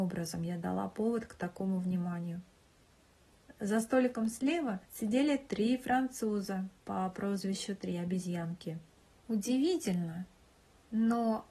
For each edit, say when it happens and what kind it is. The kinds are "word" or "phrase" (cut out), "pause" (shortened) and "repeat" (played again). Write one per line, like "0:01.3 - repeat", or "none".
0:04.9 - pause
0:06.8 - pause
0:09.0 - pause